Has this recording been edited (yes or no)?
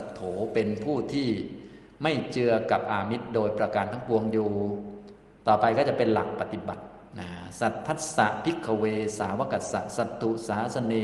no